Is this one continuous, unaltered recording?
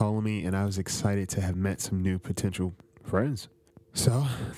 no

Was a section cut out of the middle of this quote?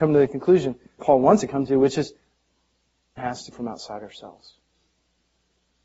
yes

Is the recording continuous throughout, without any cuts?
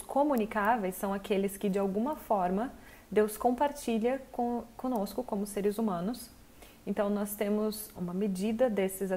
no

